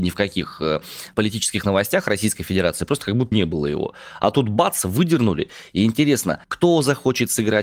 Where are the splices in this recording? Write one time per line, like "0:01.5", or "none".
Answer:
0:03.3
0:06.4